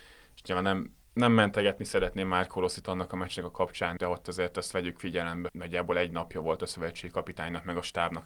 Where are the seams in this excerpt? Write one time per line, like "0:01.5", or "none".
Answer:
0:04.0
0:05.5